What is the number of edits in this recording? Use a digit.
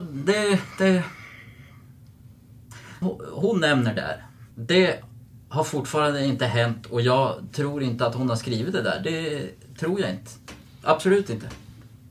2